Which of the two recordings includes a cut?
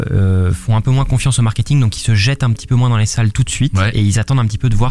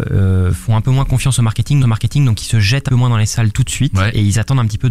second; 2 cuts; at 1.8 s, 2.9 s

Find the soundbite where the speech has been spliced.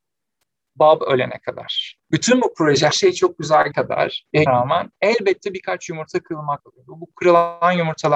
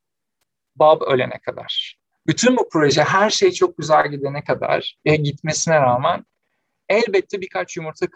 first; 6 cuts; at 2.0 s, 2.9 s, 3.7 s, 4.5 s, 5.0 s, 6.6 s

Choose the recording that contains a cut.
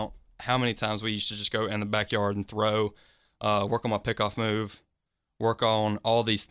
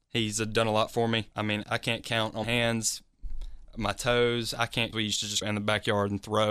second; 5 cuts; at 1.3 s, 1.6 s, 2.4 s, 4.9 s, 5.4 s

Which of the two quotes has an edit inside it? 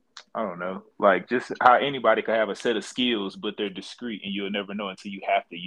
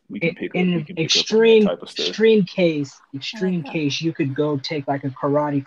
first; 1 cut; at 0.9 s

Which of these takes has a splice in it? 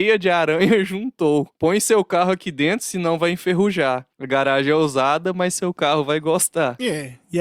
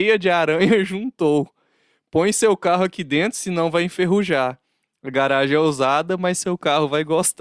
first; 2 cuts; at 1.5 s, 4.1 s

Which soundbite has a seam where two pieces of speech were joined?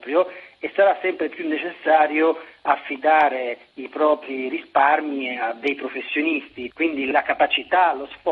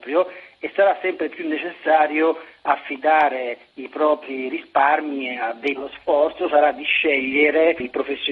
second; 1 cut; at 5.8 s

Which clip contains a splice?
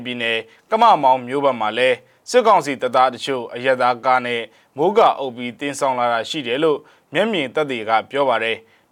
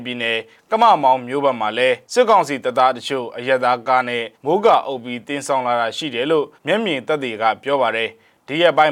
second; 3 cuts; at 2.0 s, 4.3 s, 6.6 s

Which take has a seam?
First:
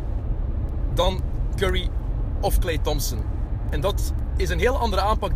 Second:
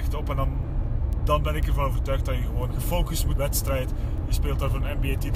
second; 2 cuts; at 2.7 s, 3.4 s

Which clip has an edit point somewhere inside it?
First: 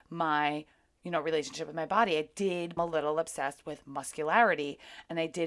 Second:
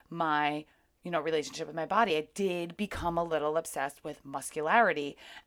first; 1 cut; at 2.8 s

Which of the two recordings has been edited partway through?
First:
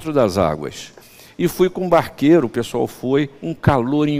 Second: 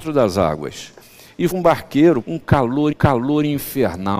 second; 3 cuts; at 1.5 s, 2.2 s, 2.9 s

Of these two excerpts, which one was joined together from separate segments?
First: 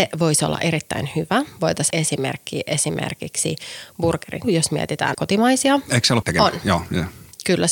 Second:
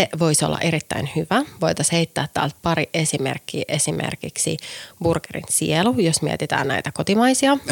first; 4 cuts; at 1.9 s, 4.4 s, 5.1 s, 6.2 s

